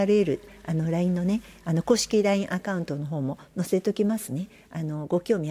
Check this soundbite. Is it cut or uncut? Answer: uncut